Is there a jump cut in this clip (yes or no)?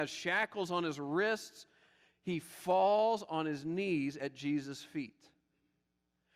no